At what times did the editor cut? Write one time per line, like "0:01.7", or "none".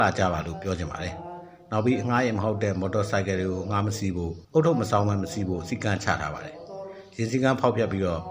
0:04.4